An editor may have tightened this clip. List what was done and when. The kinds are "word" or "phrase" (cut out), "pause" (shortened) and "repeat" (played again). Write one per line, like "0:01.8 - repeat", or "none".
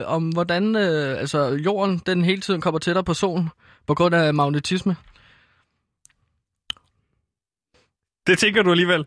none